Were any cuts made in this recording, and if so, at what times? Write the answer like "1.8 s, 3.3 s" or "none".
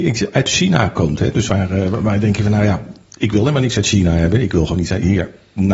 none